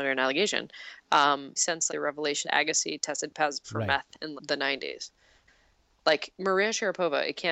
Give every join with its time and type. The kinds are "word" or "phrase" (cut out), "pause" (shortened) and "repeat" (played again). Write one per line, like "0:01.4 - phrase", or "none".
0:01.6 - word
0:01.9 - word
0:02.4 - word
0:03.6 - word
0:04.4 - word

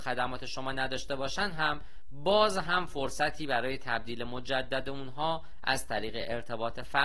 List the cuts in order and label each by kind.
none

